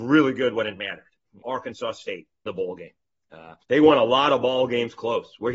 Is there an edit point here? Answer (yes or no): yes